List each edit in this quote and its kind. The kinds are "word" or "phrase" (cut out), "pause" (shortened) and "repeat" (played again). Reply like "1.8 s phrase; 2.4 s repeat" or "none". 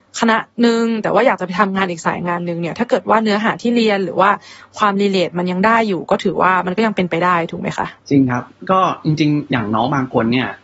8.0 s pause